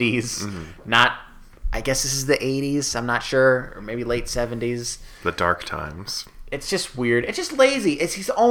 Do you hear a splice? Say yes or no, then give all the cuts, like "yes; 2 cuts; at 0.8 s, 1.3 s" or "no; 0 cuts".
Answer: yes; 1 cut; at 5.2 s